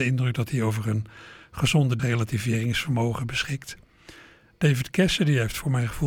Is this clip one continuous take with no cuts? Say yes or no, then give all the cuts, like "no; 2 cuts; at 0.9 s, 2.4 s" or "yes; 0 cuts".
no; 1 cut; at 2.0 s